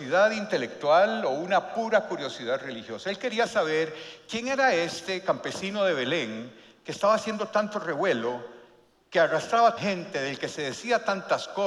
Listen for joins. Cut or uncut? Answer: cut